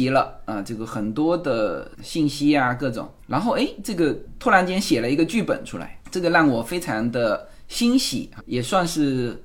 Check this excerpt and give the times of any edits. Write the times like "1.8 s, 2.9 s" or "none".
2.0 s, 8.4 s